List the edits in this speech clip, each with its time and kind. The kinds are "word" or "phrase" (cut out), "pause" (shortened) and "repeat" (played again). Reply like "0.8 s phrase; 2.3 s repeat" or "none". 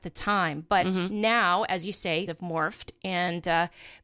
2.3 s word